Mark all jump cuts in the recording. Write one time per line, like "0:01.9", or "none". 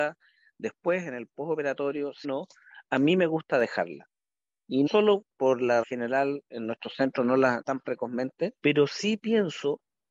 0:02.2
0:04.9
0:05.3
0:05.8
0:06.5
0:07.6